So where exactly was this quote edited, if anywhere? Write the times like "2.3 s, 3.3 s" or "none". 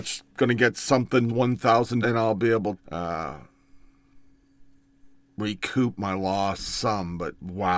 1.3 s, 2.0 s, 2.8 s